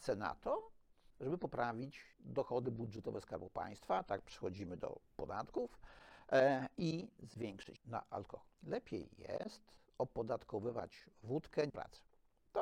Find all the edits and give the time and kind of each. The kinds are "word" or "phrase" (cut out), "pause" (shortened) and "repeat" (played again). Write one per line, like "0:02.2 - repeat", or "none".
0:02.1 - pause
0:05.1 - pause
0:07.8 - word
0:08.5 - pause
0:11.7 - word